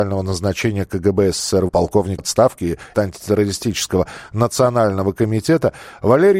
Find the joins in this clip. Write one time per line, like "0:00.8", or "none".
0:01.7
0:02.2
0:02.9